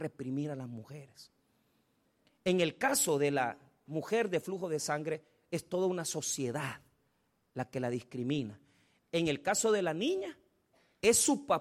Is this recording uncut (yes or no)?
yes